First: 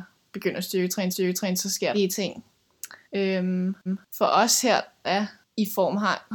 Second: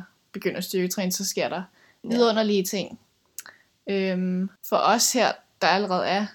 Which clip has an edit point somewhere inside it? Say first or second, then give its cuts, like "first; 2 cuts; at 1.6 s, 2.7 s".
first; 5 cuts; at 1.1 s, 1.9 s, 3.0 s, 3.9 s, 5.0 s